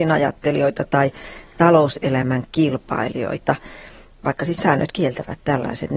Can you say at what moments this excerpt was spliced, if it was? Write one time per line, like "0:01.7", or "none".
0:04.6